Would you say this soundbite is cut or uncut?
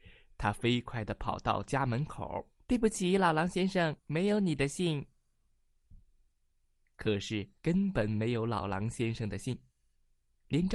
cut